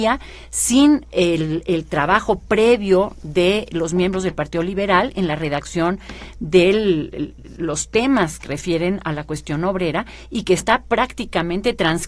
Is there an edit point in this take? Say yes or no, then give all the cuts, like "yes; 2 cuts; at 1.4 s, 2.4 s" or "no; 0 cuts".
yes; 1 cut; at 8.4 s